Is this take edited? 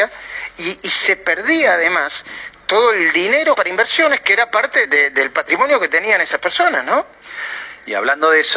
yes; 2 cuts; at 3.5 s, 4.8 s

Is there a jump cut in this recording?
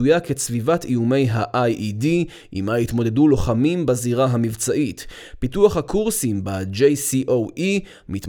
no; 0 cuts

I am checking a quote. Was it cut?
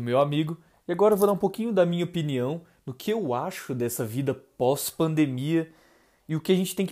no; 0 cuts

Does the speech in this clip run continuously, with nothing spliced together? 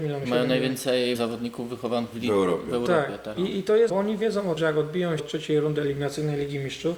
no; 5 cuts; at 1.1 s, 2.1 s, 3.9 s, 4.6 s, 5.2 s

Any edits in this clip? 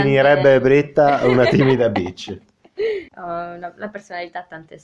yes; 1 cut; at 3.1 s

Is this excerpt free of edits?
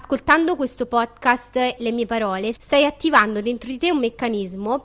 no; 1 cut; at 1.8 s

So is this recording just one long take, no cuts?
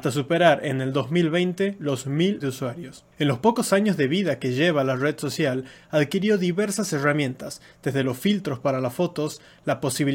no; 2 cuts; at 2.4 s, 3.1 s

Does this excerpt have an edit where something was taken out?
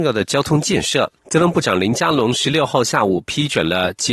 yes; 1 cut; at 1.2 s

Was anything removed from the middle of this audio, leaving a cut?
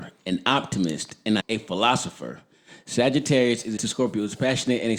yes; 2 cuts; at 1.4 s, 3.8 s

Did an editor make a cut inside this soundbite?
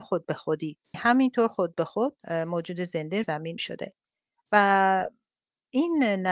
yes; 4 cuts; at 0.9 s, 2.2 s, 3.2 s, 3.6 s

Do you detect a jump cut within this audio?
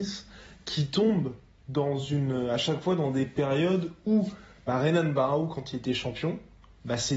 no; 0 cuts

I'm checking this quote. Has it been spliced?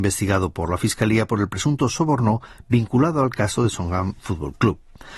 no; 0 cuts

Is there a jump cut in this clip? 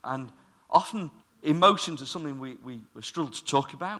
yes; 2 cuts; at 1.2 s, 2.9 s

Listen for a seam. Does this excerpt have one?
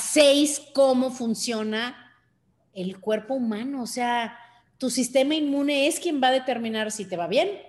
no; 0 cuts

